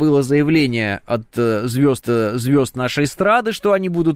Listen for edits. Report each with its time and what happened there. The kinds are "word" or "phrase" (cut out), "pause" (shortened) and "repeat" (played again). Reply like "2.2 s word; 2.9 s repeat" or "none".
2.0 s repeat